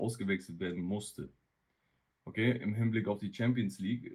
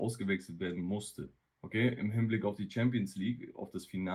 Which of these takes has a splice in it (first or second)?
second